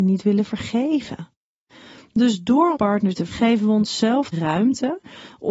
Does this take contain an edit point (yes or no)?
yes